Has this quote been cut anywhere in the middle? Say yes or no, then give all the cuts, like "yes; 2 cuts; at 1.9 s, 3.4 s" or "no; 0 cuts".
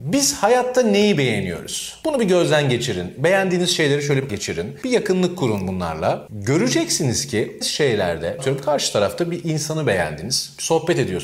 yes; 3 cuts; at 4.3 s, 7.6 s, 8.4 s